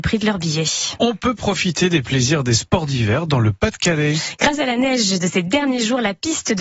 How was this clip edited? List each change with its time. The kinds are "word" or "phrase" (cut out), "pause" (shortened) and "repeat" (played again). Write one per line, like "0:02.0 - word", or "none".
none

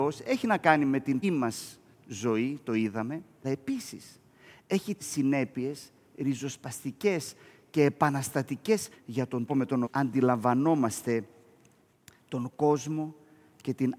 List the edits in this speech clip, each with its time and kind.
0:01.2 - word
0:03.4 - word
0:05.0 - word
0:08.9 - word
0:09.5 - word
0:09.8 - word

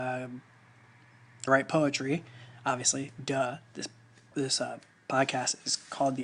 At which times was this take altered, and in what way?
0:01.5 - word
0:04.3 - word

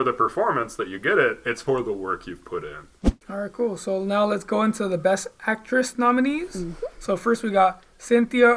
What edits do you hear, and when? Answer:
0:03.2 - pause
0:06.9 - pause

